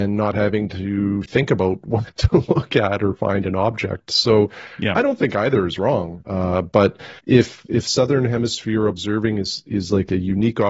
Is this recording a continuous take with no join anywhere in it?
no; 1 cut; at 7.2 s

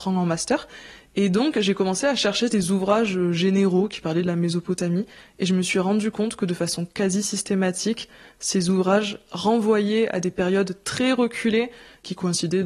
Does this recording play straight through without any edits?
yes; 0 cuts

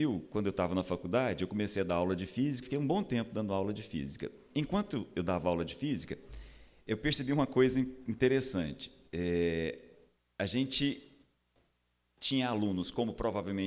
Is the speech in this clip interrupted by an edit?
yes; 1 cut; at 2.6 s

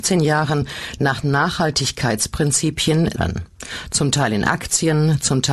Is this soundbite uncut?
no; 1 cut; at 3.1 s

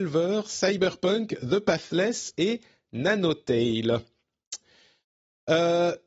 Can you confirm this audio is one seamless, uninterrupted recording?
yes; 0 cuts

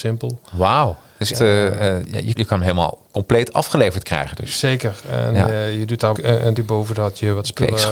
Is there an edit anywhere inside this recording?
yes; 4 cuts; at 1.3 s, 2.4 s, 6.2 s, 6.6 s

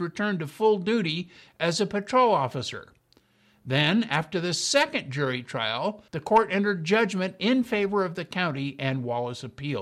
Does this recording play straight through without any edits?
no; 1 cut; at 6.1 s

